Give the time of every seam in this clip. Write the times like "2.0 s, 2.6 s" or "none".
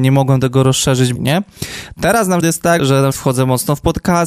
1.2 s, 2.4 s, 2.8 s, 3.1 s